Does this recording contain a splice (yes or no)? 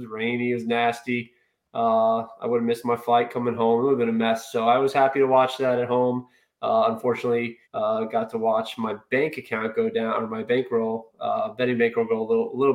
yes